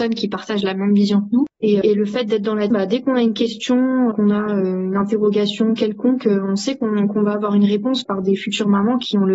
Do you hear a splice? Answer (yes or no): yes